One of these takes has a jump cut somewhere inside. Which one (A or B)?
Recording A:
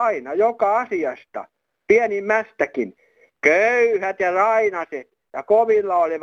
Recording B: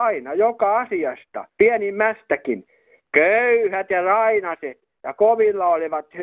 B